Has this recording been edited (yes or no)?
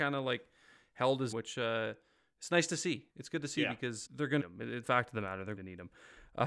yes